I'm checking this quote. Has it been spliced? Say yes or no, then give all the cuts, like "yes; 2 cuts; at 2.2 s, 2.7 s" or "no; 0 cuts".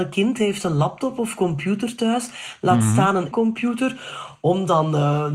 yes; 1 cut; at 3.3 s